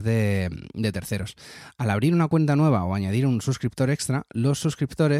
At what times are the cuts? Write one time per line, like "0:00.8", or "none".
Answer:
none

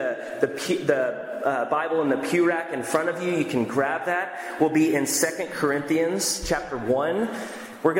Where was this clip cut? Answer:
none

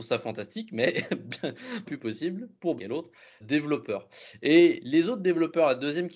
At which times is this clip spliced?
0:01.9
0:02.8
0:03.4

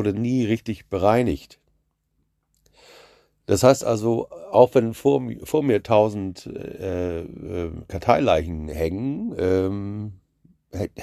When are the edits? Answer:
none

